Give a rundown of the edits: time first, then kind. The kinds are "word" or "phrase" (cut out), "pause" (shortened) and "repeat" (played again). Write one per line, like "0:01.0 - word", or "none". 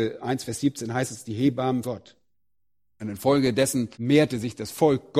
0:01.8 - word
0:03.9 - pause